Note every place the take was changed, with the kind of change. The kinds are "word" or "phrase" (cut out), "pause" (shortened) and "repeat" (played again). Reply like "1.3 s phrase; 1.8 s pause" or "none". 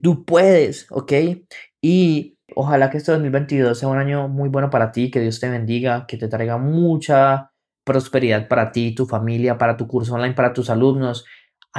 none